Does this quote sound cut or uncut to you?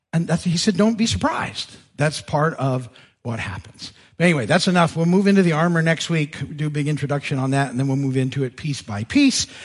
uncut